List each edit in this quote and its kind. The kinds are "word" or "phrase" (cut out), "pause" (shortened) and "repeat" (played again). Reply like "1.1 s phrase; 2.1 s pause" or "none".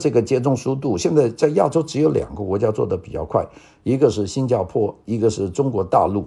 none

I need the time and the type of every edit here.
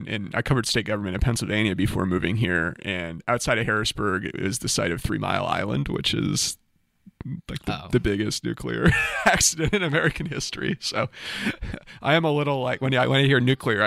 none

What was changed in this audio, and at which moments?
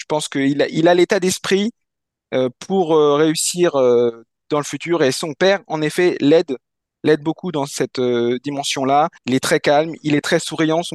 9.2 s pause

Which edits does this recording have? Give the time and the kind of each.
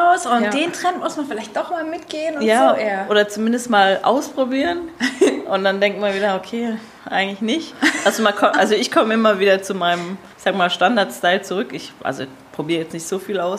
10.3 s pause

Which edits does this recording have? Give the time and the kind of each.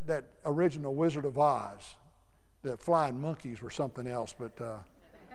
none

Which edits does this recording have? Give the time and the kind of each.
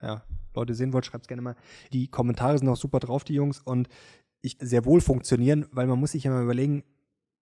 1.9 s word; 4.6 s phrase

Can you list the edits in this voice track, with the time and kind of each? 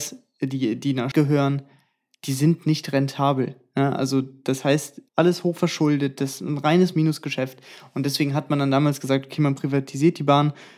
1.1 s word; 5.1 s pause

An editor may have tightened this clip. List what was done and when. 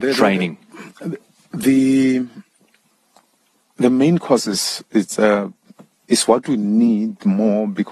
none

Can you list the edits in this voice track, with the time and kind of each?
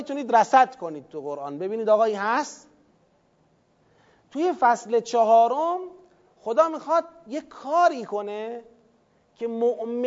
none

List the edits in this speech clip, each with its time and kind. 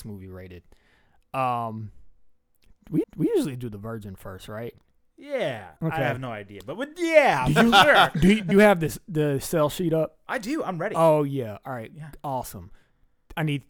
3.0 s repeat; 5.8 s pause; 8.5 s word

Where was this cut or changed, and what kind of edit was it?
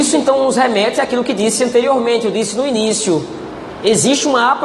none

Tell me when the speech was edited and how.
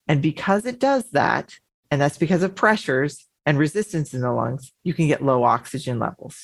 1.7 s pause; 4.8 s pause

